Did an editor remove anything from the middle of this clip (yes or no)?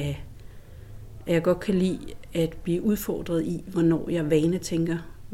no